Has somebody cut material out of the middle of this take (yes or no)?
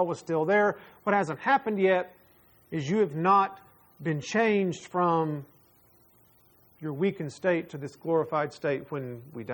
no